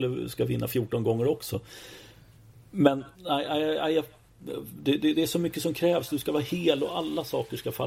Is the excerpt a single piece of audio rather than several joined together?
no; 1 cut; at 3.1 s

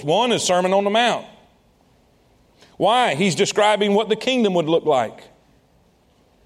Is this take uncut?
yes; 0 cuts

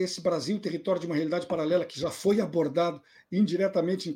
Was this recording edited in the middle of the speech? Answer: no; 0 cuts

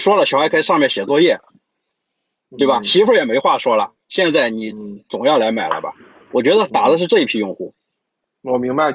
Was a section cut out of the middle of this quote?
no; 0 cuts

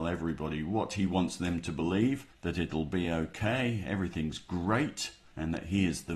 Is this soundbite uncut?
yes; 0 cuts

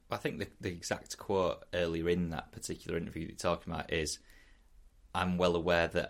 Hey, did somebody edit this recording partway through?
no; 0 cuts

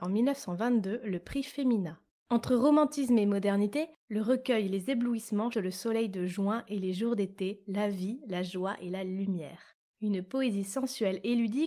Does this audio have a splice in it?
yes; 2 cuts; at 2.1 s, 5.5 s

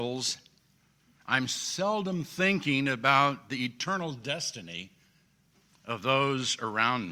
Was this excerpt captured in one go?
yes; 0 cuts

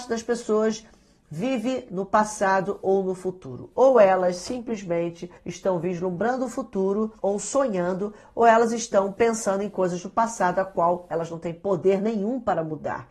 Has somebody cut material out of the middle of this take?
yes; 2 cuts; at 5.4 s, 7.2 s

